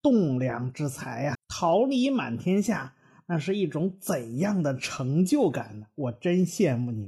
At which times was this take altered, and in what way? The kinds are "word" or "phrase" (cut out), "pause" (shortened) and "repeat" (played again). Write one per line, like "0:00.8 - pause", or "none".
0:01.3 - word